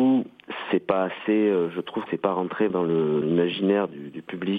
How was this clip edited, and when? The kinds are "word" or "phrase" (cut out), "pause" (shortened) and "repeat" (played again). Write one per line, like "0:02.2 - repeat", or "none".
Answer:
0:02.1 - word
0:02.7 - word
0:03.2 - word